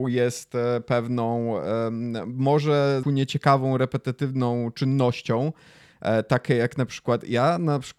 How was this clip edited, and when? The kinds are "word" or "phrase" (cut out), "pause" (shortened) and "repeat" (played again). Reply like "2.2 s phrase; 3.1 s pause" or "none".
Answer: 3.0 s phrase